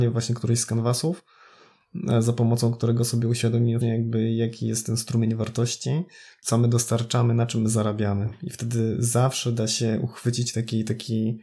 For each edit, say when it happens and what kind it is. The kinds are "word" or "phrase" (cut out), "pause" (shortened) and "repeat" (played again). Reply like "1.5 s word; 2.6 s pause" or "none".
3.8 s word